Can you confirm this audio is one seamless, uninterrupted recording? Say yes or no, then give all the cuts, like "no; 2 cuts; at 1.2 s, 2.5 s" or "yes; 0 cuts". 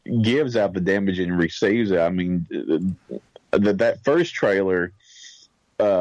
yes; 0 cuts